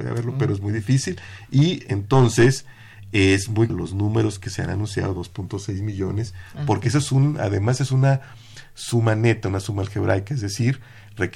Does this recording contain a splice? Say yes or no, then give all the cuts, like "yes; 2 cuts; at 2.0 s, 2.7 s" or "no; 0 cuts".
yes; 1 cut; at 3.7 s